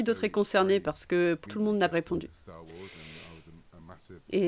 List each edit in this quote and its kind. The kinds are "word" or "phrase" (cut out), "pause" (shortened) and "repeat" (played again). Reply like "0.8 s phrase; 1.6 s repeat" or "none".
1.5 s word; 1.9 s phrase